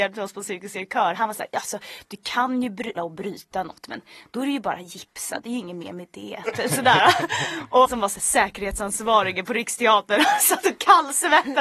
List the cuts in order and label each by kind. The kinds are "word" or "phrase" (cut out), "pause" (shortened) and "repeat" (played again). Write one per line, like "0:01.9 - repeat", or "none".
0:03.0 - word
0:07.9 - word